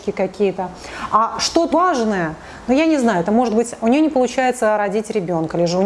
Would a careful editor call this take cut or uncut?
cut